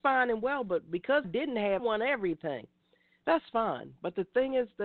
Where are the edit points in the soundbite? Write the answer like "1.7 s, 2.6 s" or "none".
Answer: 1.2 s, 1.8 s